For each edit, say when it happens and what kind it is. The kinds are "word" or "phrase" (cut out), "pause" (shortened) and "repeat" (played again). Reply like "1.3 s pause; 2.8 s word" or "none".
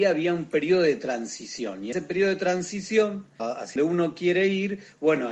1.9 s word; 3.4 s word; 3.8 s word